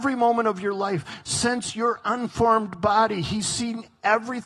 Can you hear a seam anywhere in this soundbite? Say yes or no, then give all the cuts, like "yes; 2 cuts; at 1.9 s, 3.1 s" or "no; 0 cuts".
no; 0 cuts